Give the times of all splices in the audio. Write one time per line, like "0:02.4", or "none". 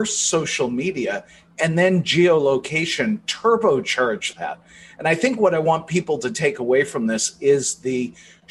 none